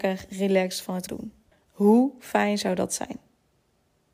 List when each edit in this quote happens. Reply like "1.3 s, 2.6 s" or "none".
1.1 s, 1.5 s